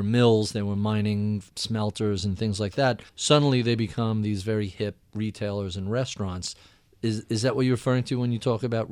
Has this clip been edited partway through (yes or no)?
yes